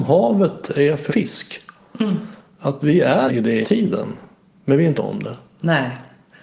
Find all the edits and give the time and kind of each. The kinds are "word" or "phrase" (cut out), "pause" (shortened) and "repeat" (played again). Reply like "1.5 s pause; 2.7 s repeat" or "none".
1.1 s word; 2.8 s word; 3.3 s word; 3.6 s word; 5.0 s word